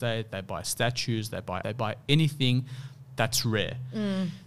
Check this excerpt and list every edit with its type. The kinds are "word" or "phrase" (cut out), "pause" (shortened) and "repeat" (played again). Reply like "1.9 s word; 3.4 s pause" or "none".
1.6 s word